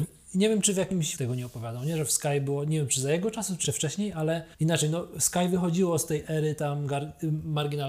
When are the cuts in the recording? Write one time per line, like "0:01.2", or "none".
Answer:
0:01.2
0:03.6
0:04.5